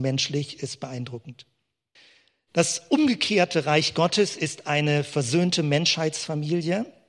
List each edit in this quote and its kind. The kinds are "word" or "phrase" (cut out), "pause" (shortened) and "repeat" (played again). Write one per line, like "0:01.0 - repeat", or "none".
0:02.0 - pause